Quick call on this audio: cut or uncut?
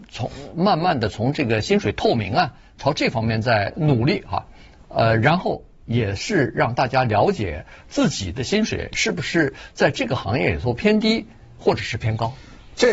uncut